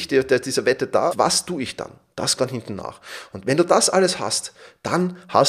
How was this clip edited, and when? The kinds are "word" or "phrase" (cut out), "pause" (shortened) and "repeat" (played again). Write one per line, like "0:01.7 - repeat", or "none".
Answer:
0:01.1 - word
0:02.4 - word